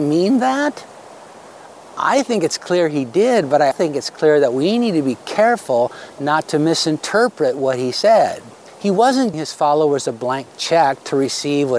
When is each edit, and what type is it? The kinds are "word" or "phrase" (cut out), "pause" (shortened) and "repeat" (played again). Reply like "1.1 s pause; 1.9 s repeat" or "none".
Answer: 3.7 s word; 8.7 s pause; 9.3 s word